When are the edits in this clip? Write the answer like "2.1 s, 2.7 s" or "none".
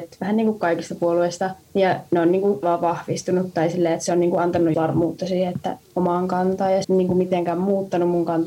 1.6 s, 2.6 s, 4.7 s, 5.8 s, 6.8 s